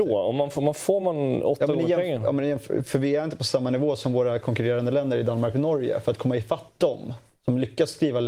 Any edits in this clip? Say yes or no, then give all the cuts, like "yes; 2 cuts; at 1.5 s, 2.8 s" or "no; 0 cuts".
no; 0 cuts